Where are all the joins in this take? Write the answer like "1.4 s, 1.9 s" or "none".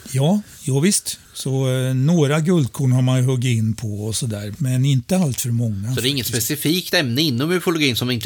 1.2 s, 4.5 s